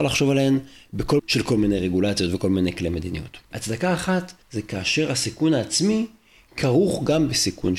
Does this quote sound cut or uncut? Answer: cut